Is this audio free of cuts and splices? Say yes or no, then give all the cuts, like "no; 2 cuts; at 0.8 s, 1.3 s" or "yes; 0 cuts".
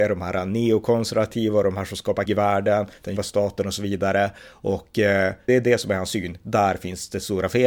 no; 3 cuts; at 2.3 s, 3.2 s, 5.5 s